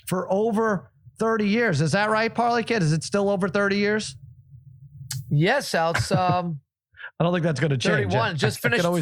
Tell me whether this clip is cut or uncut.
uncut